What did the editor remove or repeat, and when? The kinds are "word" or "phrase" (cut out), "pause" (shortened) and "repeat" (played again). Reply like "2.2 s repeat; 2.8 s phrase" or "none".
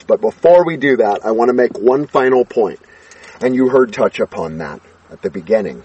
3.9 s word